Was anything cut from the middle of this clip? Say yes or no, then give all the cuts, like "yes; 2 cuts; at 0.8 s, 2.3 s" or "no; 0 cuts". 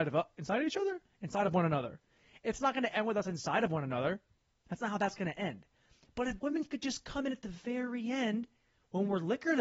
no; 0 cuts